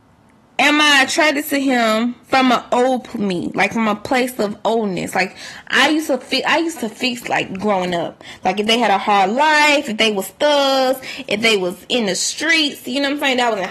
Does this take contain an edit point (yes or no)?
yes